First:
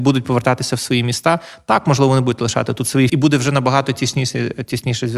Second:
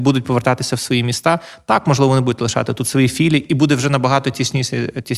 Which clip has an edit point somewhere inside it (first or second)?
first